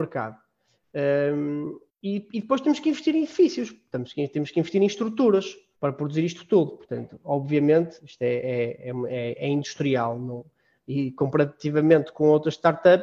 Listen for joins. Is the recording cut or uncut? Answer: cut